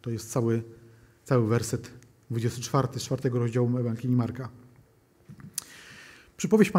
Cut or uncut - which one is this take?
uncut